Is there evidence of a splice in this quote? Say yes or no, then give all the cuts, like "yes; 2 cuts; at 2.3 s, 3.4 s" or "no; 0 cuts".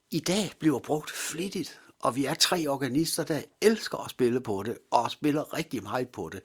no; 0 cuts